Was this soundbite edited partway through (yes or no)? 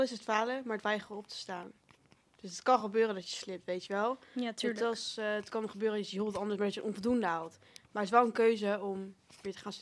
no